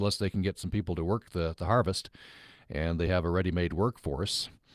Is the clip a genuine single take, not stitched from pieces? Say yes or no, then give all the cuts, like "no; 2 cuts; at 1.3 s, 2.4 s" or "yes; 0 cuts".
yes; 0 cuts